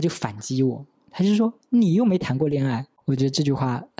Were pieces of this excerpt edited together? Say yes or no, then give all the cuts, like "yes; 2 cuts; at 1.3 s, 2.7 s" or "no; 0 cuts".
yes; 1 cut; at 1.6 s